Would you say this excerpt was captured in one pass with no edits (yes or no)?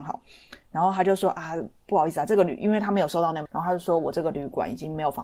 no